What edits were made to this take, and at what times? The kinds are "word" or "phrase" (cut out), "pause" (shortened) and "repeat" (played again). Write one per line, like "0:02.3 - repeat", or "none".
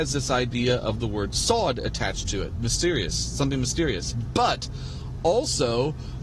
none